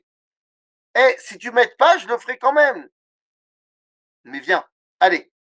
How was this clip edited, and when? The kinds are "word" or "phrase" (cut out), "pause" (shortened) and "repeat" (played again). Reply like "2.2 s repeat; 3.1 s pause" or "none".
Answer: none